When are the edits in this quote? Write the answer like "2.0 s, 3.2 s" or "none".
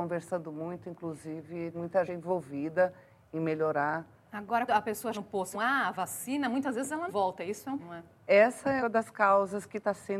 1.7 s, 2.1 s, 4.7 s, 5.1 s, 5.5 s, 7.1 s, 7.8 s, 8.8 s